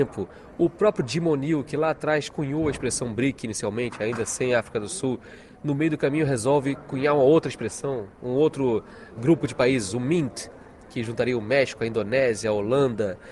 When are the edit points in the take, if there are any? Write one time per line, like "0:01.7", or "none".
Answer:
0:09.2